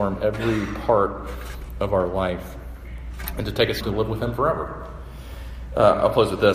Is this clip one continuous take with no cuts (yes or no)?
no